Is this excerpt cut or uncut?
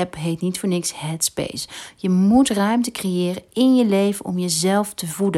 uncut